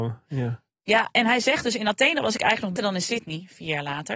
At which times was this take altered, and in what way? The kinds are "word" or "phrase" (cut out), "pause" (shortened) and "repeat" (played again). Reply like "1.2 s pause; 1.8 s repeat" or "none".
2.8 s word